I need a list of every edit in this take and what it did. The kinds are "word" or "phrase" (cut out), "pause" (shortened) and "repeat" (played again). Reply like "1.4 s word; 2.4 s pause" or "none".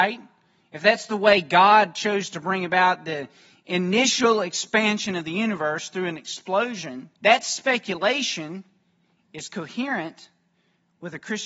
7.2 s pause